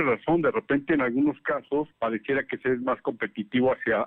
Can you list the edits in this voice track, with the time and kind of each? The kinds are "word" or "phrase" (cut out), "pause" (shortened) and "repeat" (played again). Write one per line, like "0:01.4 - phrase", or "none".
0:01.9 - pause